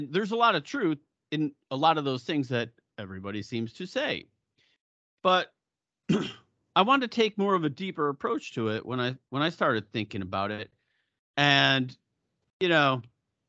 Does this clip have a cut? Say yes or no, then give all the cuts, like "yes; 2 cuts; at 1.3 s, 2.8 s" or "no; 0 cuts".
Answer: no; 0 cuts